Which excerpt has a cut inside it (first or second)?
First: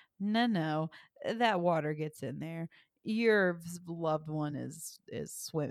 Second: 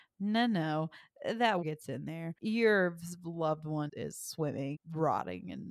second